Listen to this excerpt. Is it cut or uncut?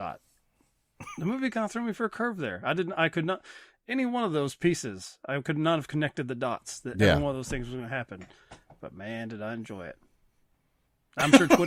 uncut